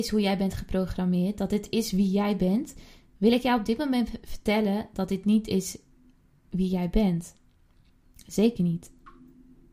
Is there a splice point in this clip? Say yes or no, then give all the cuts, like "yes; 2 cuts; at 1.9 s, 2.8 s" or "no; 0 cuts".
no; 0 cuts